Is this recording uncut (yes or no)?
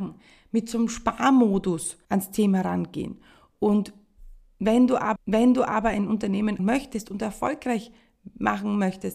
no